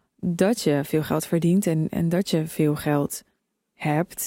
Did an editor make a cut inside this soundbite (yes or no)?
no